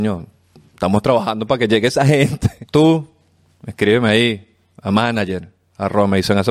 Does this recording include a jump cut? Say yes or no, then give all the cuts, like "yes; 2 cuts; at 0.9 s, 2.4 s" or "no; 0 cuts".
no; 0 cuts